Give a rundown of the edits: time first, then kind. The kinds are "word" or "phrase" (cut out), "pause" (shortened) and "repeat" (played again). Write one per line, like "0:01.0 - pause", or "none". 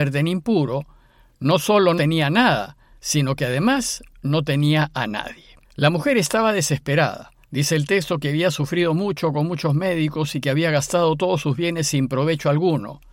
0:02.0 - word
0:05.6 - pause
0:07.4 - pause